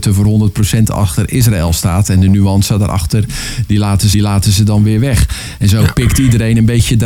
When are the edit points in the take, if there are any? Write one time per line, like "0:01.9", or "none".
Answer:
0:04.1

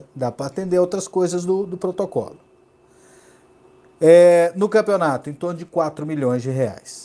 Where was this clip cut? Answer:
none

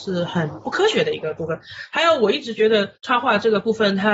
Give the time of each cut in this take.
0:02.9

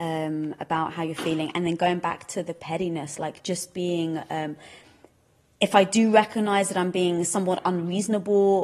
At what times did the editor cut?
none

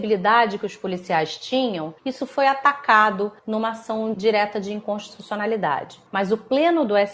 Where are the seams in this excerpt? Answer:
0:02.0
0:03.4
0:04.1
0:06.1

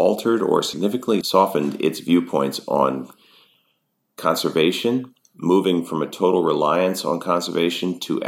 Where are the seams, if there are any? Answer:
none

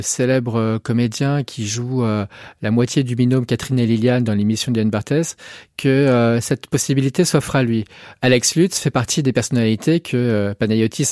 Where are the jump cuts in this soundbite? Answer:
none

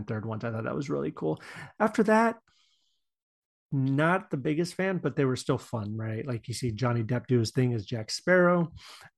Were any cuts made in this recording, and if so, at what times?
none

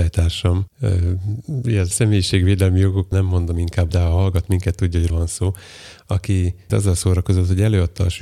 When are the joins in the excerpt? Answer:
0:01.9
0:03.1
0:03.9
0:05.1
0:06.7

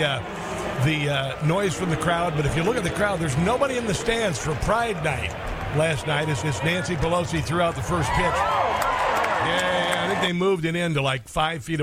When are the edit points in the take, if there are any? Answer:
0:06.4
0:09.4

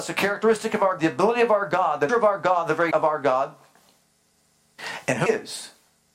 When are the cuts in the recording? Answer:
0:01.0
0:02.1
0:02.9
0:05.3

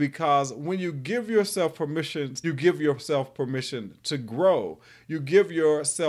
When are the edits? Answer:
0:02.4

